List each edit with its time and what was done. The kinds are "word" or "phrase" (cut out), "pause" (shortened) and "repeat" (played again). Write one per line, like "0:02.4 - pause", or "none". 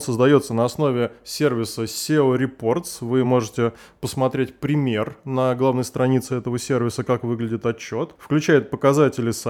none